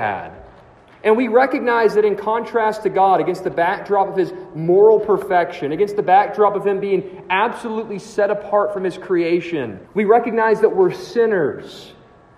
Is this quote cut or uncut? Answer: cut